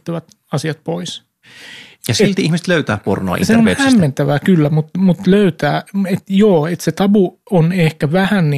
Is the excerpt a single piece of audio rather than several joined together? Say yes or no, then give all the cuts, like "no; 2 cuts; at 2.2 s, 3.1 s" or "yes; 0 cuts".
no; 1 cut; at 7.4 s